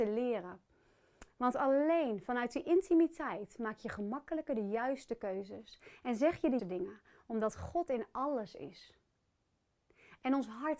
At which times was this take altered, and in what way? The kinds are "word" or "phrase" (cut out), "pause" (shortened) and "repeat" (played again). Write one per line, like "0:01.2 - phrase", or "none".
0:06.6 - word